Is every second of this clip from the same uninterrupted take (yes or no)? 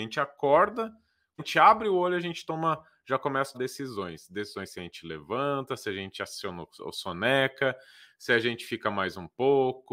no